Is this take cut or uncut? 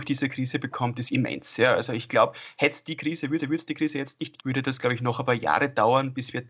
cut